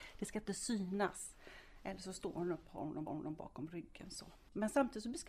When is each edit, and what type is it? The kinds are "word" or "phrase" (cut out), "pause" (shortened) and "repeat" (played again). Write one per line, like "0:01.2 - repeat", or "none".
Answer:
0:02.7 - word
0:03.1 - repeat